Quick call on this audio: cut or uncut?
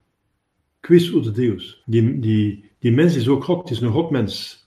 cut